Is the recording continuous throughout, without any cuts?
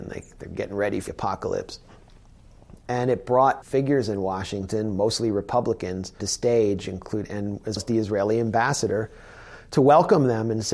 no; 4 cuts; at 1.1 s, 3.6 s, 6.2 s, 7.8 s

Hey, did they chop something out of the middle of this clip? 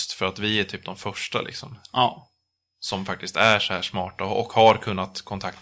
no; 0 cuts

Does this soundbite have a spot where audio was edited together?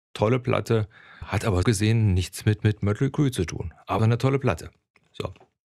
yes; 4 cuts; at 1.2 s, 1.6 s, 2.6 s, 4.0 s

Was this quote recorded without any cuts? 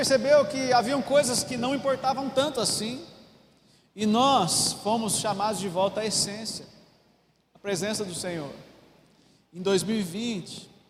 yes; 0 cuts

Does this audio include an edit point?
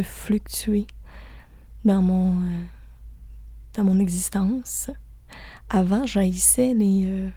no; 0 cuts

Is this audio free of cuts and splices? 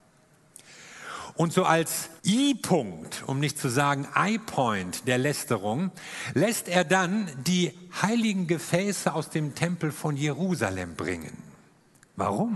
no; 1 cut; at 2.2 s

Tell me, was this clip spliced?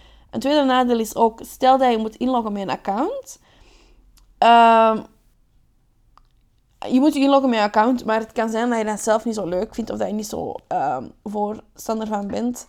no; 0 cuts

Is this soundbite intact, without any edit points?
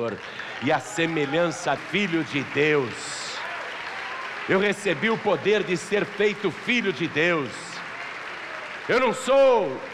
no; 1 cut; at 1.8 s

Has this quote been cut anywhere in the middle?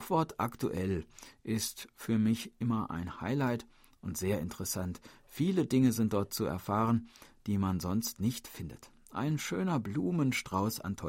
no; 0 cuts

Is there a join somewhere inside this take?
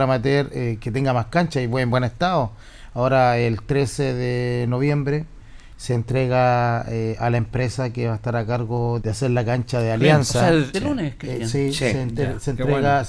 yes; 2 cuts; at 9.0 s, 10.7 s

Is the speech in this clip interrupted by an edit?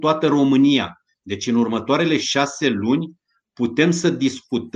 no; 0 cuts

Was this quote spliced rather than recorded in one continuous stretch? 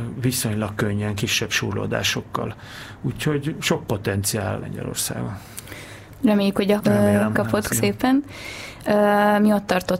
yes; 4 cuts; at 4.6 s, 6.8 s, 7.3 s, 7.7 s

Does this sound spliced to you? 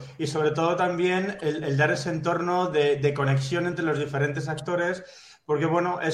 no; 0 cuts

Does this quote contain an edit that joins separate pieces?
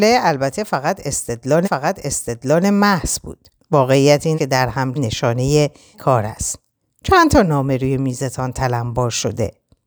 yes; 6 cuts; at 1.6 s, 3.6 s, 4.3 s, 4.9 s, 5.9 s, 6.8 s

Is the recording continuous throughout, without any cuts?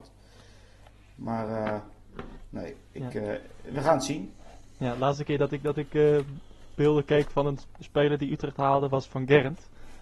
yes; 0 cuts

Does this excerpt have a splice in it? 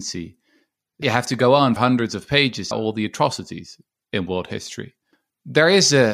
yes; 3 cuts; at 1.0 s, 1.8 s, 2.7 s

